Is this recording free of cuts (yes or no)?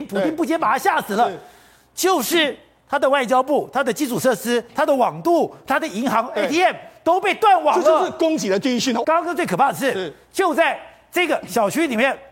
yes